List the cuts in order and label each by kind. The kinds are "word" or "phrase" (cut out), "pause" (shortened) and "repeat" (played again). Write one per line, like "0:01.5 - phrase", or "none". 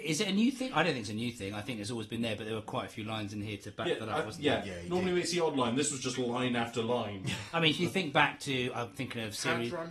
none